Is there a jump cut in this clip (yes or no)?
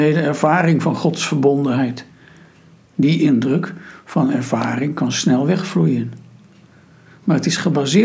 no